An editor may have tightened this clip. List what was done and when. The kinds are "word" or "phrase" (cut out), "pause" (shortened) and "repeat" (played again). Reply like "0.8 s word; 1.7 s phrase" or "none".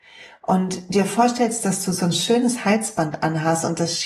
none